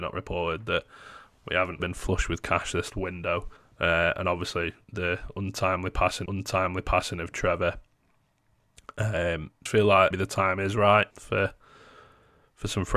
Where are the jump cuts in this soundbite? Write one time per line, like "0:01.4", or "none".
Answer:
0:01.8
0:02.9
0:03.6
0:04.8
0:06.3
0:09.7
0:10.1
0:11.1